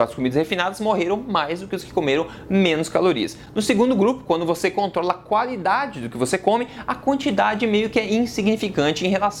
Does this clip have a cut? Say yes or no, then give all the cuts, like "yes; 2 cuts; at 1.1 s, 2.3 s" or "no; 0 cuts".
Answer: no; 0 cuts